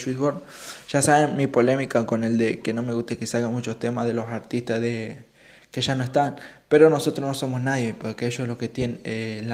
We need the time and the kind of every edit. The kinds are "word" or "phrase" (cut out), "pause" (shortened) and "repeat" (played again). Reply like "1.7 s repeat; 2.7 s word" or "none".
none